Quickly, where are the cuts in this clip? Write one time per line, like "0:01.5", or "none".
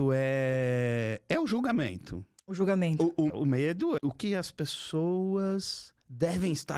0:03.3
0:04.0